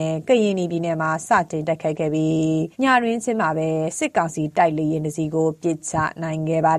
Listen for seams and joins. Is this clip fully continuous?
no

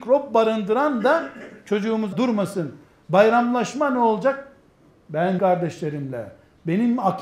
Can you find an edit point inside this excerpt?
yes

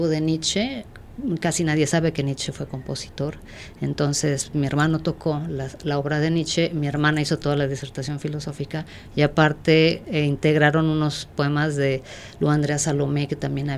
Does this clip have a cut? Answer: no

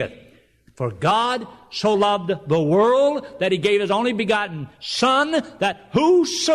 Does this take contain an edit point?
no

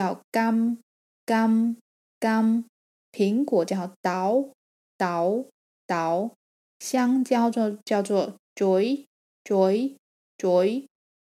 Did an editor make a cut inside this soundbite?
no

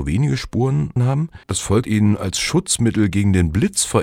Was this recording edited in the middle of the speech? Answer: yes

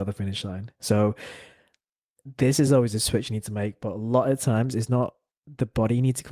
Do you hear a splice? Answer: no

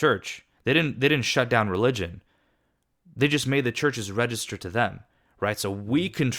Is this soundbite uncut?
yes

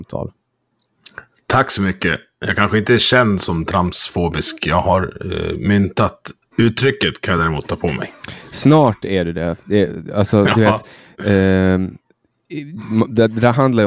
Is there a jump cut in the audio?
no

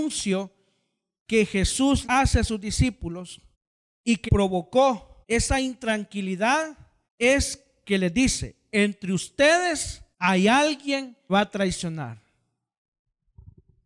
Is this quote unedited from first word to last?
no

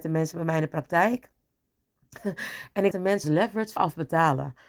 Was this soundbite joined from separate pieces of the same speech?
yes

